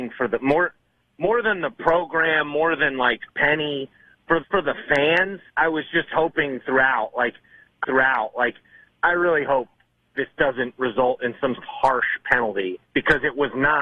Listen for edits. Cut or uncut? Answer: cut